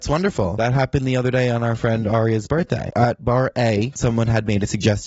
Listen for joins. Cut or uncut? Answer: uncut